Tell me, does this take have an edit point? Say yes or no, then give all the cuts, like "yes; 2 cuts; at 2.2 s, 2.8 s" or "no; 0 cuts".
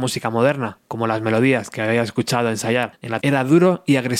yes; 1 cut; at 3.2 s